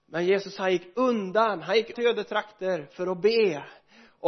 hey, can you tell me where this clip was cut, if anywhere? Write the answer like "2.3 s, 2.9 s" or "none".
1.9 s